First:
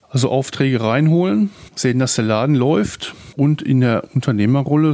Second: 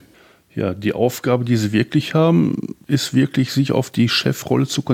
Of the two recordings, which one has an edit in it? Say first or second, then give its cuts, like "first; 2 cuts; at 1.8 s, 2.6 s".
first; 1 cut; at 1.7 s